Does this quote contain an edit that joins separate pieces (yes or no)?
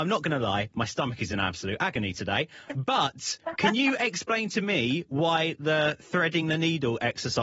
no